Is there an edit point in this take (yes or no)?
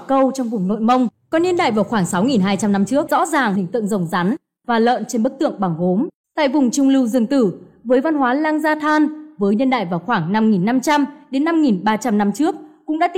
yes